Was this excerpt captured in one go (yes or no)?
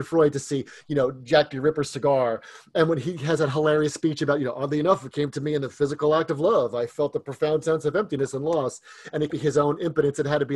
no